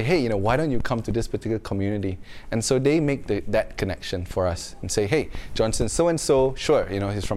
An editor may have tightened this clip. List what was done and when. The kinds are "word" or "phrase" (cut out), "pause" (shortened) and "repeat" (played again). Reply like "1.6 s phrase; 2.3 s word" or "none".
none